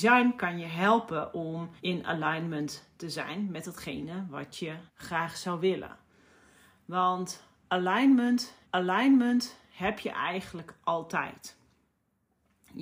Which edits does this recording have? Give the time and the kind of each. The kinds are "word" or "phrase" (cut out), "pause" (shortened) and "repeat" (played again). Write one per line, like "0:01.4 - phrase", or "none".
0:01.8 - pause
0:04.9 - pause
0:08.6 - repeat